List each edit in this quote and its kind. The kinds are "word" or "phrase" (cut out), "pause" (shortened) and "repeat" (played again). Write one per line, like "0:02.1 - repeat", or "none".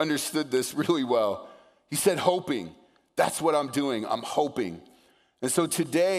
none